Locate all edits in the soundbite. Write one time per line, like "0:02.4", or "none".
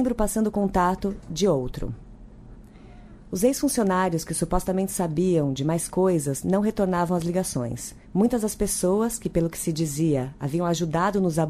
0:08.0